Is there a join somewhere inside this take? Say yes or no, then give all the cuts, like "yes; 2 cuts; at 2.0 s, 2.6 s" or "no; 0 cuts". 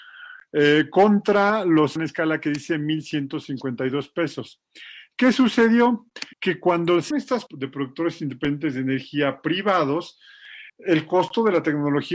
yes; 5 cuts; at 2.0 s, 6.3 s, 7.1 s, 7.5 s, 10.7 s